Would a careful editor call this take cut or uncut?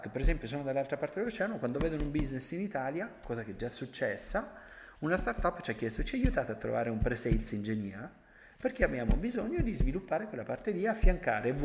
uncut